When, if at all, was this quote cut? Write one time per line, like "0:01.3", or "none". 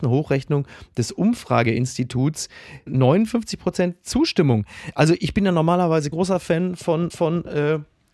0:06.1
0:07.1